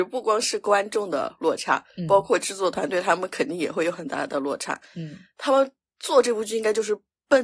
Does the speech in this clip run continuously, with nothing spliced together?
yes; 0 cuts

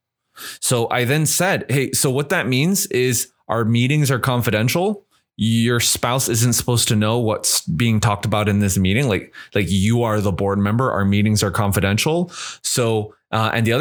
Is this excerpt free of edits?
yes; 0 cuts

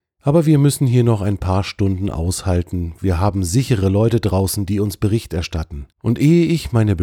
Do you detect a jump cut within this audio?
yes; 1 cut; at 5.9 s

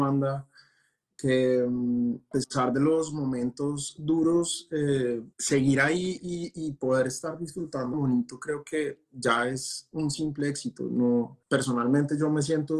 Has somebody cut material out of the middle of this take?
yes; 4 cuts; at 2.3 s, 5.3 s, 7.9 s, 11.4 s

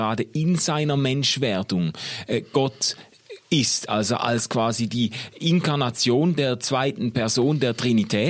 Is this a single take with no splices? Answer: yes; 0 cuts

